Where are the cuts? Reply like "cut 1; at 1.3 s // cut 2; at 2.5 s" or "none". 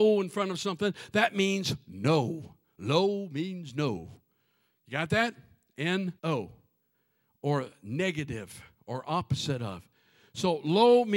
cut 1; at 6.2 s